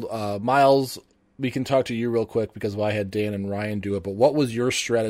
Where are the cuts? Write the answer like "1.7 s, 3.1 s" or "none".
none